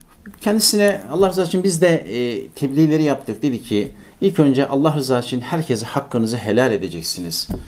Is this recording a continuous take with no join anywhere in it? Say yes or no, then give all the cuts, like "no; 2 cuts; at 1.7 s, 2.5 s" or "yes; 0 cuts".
yes; 0 cuts